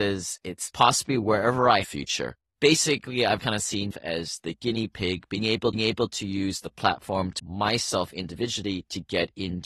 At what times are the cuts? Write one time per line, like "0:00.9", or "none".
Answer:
0:01.8
0:03.4
0:03.9
0:05.7
0:07.4